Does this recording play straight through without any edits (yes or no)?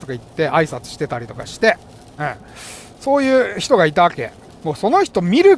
yes